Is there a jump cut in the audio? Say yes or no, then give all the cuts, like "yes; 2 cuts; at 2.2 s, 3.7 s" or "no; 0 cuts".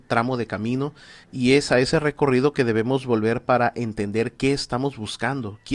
yes; 1 cut; at 1.2 s